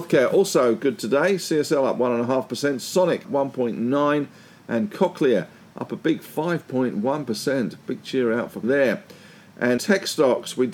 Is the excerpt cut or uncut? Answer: cut